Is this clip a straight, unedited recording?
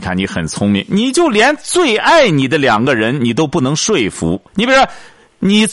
no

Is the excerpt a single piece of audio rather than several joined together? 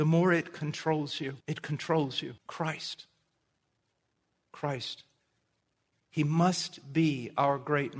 no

